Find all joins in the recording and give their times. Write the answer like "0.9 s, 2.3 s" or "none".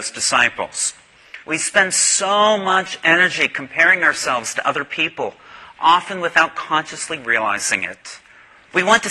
1.4 s

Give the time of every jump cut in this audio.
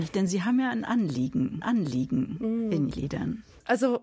1.6 s, 2.9 s

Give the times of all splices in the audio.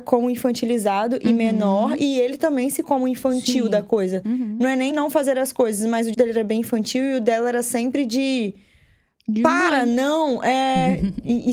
2.8 s, 4.9 s, 6.1 s

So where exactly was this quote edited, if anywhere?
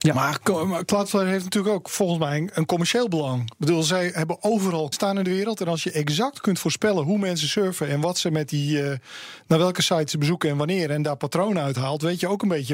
4.9 s

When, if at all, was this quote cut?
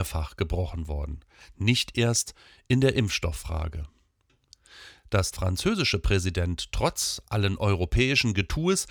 5.3 s

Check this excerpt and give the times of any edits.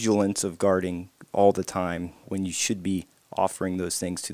2.2 s

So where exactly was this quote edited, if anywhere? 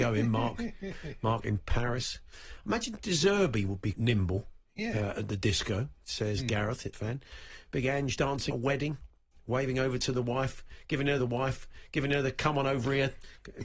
3.9 s, 6.9 s, 8.2 s, 8.5 s, 11.2 s

